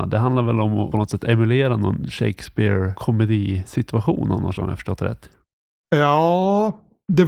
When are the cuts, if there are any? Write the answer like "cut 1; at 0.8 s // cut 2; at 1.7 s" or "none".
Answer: cut 1; at 4.6 s